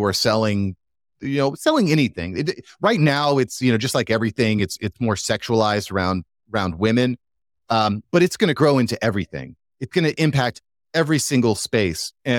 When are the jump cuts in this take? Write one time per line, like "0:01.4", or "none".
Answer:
none

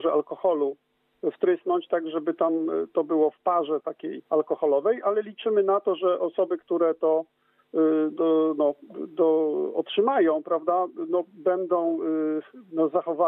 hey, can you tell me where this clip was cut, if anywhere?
0:04.3
0:08.1

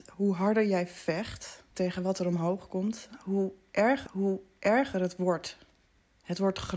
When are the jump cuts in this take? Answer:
0:01.7
0:04.1

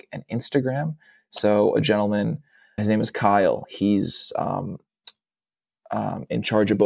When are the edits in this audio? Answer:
0:02.8

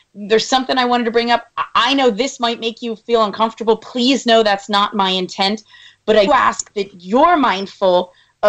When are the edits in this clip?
0:06.3

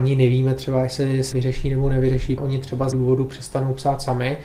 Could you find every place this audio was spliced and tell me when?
0:01.3
0:02.4
0:02.9

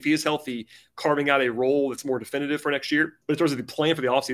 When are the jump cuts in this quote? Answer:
0:03.2

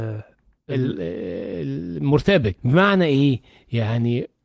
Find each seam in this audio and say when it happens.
0:02.6

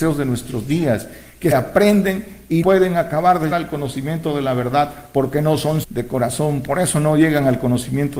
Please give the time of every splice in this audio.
0:01.5
0:02.6
0:03.5
0:05.8

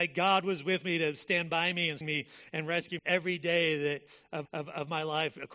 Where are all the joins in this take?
0:02.0
0:03.0
0:04.5

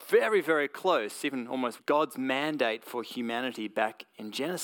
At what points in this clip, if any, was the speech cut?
0:01.8

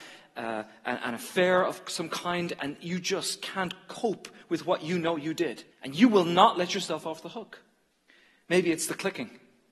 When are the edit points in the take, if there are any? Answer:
0:05.7
0:07.9

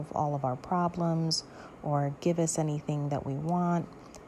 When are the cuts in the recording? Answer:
none

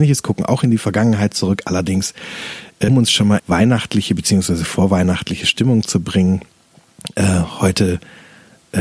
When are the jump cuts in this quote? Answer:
0:02.9
0:03.4

